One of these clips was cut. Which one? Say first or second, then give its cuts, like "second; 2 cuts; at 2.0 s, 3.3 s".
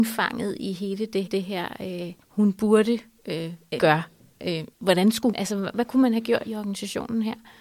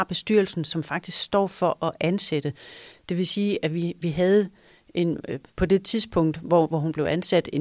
first; 6 cuts; at 1.3 s, 2.2 s, 3.8 s, 4.7 s, 5.3 s, 6.5 s